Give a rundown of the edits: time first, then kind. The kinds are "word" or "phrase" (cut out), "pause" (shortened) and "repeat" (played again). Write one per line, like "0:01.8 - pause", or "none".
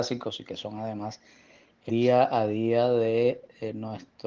0:01.9 - word